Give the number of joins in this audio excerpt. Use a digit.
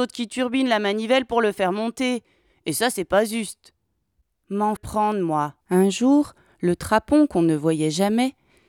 2